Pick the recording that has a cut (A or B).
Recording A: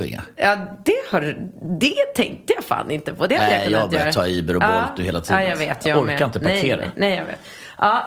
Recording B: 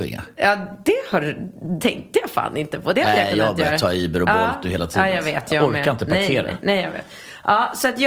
B